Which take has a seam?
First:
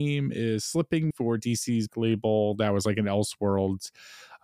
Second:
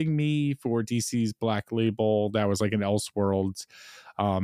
first; 2 cuts; at 1.1 s, 1.9 s

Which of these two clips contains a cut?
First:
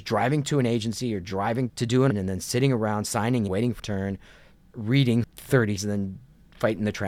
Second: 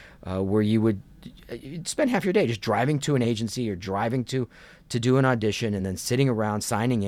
first; 6 cuts; at 1.7 s, 2.1 s, 3.5 s, 3.8 s, 5.2 s, 5.8 s

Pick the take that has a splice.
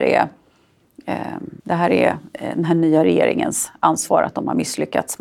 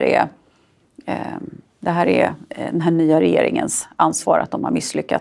first; 1 cut; at 1.6 s

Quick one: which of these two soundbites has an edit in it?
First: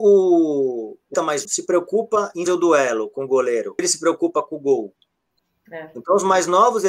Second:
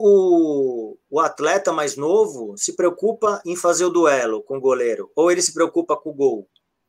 first; 4 cuts; at 1.1 s, 1.4 s, 2.5 s, 3.8 s

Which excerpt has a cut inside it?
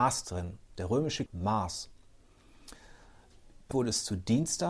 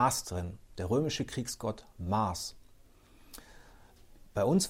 first; 2 cuts; at 1.3 s, 3.7 s

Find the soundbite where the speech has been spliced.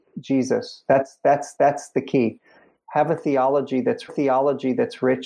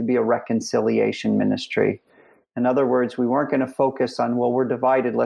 first; 2 cuts; at 1.6 s, 4.1 s

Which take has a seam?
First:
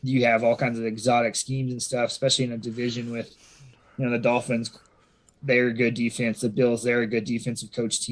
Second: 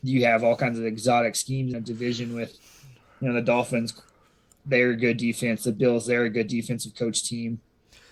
second; 1 cut; at 1.7 s

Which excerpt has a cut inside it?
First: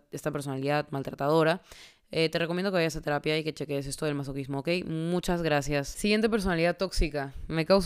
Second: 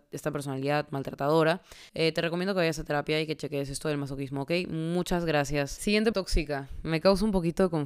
second; 2 cuts; at 1.9 s, 6.1 s

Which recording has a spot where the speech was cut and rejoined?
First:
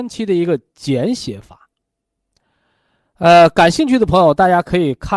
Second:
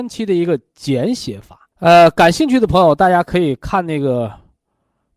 second; 1 cut; at 1.7 s

